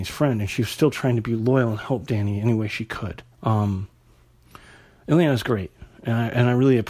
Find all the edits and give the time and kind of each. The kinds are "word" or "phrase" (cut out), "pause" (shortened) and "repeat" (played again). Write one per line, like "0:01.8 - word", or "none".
0:03.3 - pause